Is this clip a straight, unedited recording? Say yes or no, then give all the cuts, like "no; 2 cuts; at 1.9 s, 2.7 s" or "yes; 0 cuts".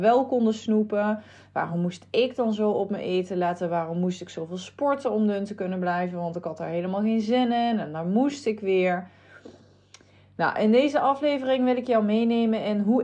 yes; 0 cuts